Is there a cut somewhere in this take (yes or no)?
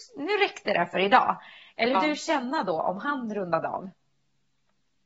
yes